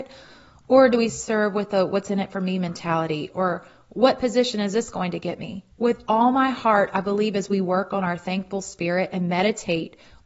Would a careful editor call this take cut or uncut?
cut